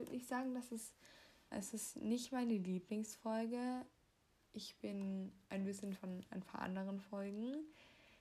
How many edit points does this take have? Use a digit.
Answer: 2